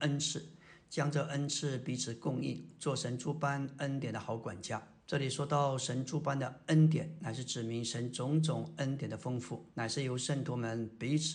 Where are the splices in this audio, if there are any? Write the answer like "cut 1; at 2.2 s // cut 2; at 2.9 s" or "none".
cut 1; at 5.0 s // cut 2; at 9.7 s